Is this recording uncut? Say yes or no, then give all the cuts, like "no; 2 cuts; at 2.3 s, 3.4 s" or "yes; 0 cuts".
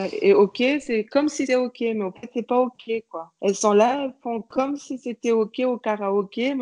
no; 1 cut; at 1.5 s